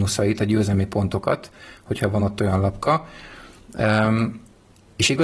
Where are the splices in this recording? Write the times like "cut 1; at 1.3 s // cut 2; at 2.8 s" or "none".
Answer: none